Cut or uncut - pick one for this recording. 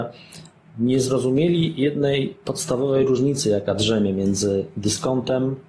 uncut